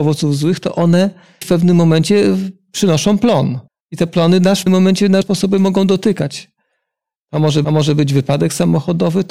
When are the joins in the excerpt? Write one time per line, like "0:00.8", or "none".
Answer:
0:01.4
0:03.7
0:04.7
0:05.2
0:07.6